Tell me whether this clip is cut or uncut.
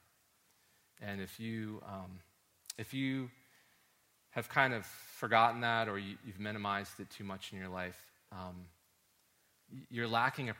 uncut